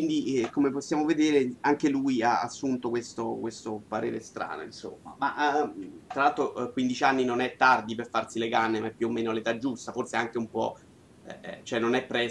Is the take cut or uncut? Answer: uncut